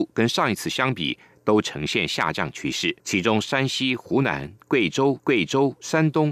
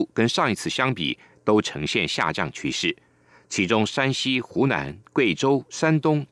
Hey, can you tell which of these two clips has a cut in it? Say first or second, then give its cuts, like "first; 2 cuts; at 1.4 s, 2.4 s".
first; 2 cuts; at 3.0 s, 5.2 s